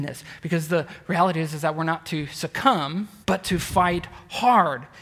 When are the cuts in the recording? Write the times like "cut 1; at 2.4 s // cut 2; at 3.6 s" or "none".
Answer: cut 1; at 3.2 s